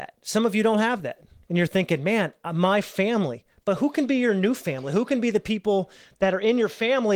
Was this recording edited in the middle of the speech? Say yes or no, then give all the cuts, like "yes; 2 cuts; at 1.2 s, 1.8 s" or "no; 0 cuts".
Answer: no; 0 cuts